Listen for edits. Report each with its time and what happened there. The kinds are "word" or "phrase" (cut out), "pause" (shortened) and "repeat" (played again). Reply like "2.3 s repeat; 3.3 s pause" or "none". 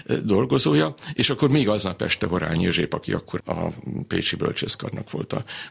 3.4 s word